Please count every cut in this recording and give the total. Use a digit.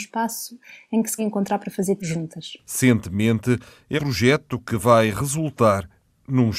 3